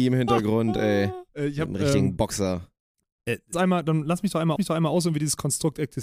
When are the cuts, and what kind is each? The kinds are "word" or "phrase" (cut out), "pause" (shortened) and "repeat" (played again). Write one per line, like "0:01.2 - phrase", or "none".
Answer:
0:01.3 - pause
0:03.5 - phrase
0:04.6 - repeat